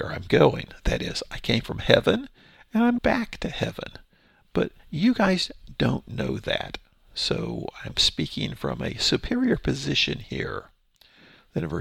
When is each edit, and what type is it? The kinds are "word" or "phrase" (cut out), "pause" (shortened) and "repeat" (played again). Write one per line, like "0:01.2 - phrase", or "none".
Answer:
0:03.0 - word